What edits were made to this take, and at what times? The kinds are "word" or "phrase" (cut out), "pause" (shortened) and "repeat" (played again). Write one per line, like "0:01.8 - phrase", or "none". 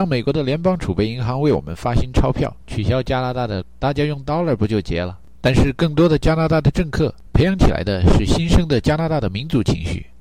0:02.6 - pause
0:03.6 - word